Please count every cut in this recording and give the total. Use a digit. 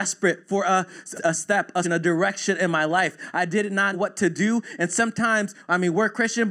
3